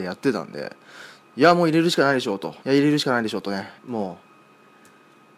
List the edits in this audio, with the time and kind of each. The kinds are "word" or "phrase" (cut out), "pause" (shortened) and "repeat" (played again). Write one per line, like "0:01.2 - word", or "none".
0:02.6 - pause
0:03.8 - pause